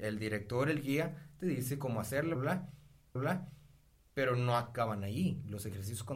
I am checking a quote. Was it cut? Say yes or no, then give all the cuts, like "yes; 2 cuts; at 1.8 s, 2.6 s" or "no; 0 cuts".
yes; 2 cuts; at 2.3 s, 3.2 s